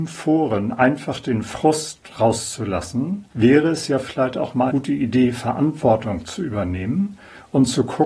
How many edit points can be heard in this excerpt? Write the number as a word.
two